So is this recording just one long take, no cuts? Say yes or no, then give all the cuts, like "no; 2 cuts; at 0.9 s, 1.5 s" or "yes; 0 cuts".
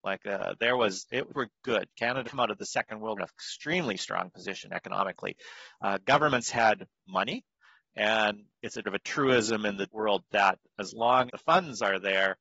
no; 6 cuts; at 1.3 s, 2.2 s, 3.2 s, 8.8 s, 9.9 s, 11.3 s